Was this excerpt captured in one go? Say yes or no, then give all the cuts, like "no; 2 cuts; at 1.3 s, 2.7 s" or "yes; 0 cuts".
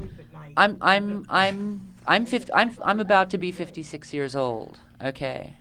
yes; 0 cuts